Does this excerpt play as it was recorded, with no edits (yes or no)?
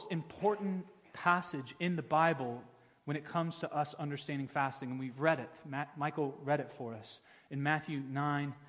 yes